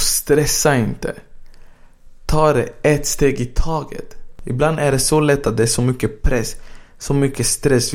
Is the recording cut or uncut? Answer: uncut